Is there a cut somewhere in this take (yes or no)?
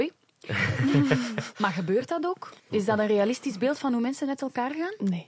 yes